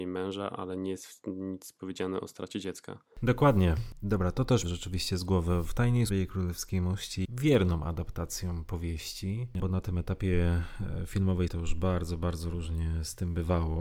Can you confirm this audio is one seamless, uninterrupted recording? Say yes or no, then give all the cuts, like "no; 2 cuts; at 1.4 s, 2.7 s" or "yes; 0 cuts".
no; 5 cuts; at 4.6 s, 6.1 s, 7.2 s, 9.6 s, 11.5 s